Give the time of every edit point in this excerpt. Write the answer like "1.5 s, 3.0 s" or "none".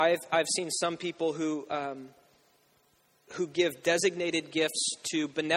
none

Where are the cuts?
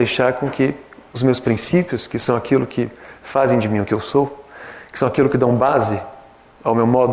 none

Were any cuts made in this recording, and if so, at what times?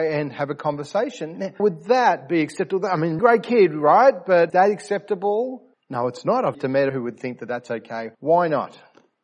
1.6 s, 3.2 s, 4.5 s, 5.7 s, 6.5 s, 6.9 s, 8.1 s

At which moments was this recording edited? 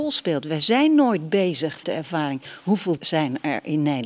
1.8 s, 3.0 s

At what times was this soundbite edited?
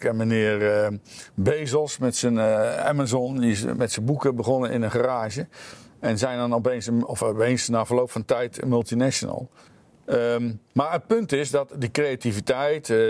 9.7 s

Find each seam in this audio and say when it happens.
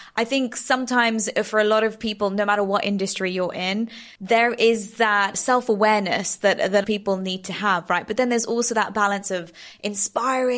4.2 s, 6.8 s

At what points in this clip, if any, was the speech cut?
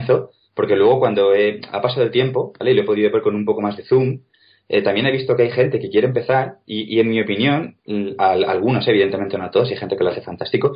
none

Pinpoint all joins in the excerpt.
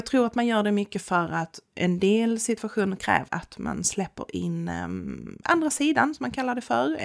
3.3 s

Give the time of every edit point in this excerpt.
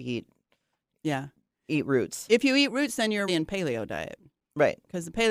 3.3 s

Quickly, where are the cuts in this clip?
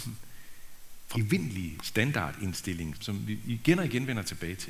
1.1 s, 2.9 s

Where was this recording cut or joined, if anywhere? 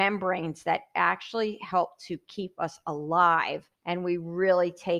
3.7 s

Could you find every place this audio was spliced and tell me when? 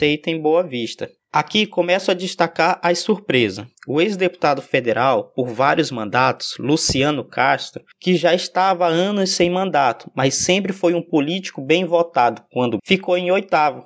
12.8 s

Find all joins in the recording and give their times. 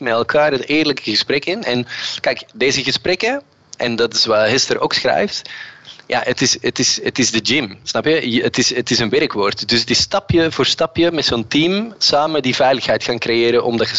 none

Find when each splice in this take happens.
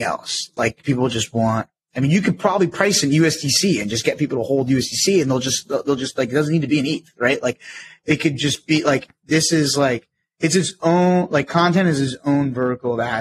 none

